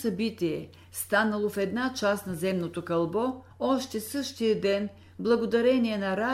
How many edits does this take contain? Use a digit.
1